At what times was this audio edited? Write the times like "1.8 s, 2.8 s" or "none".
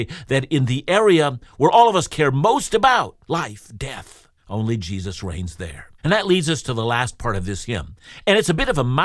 3.2 s, 4.4 s, 6.0 s